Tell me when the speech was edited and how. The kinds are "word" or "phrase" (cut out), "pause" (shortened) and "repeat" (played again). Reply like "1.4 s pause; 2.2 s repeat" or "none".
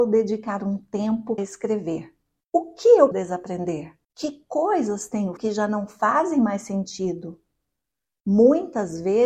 1.4 s word; 2.4 s pause; 3.1 s word; 4.0 s pause; 5.4 s word